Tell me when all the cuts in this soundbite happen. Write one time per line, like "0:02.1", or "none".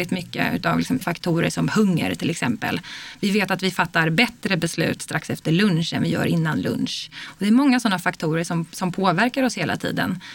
0:01.0